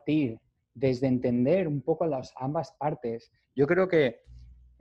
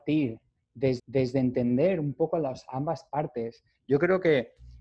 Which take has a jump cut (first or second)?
second